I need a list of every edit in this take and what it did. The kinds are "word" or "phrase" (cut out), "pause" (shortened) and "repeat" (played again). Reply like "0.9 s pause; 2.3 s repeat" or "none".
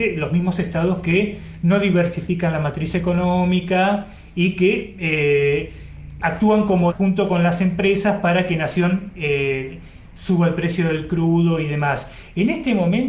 6.2 s word; 6.9 s word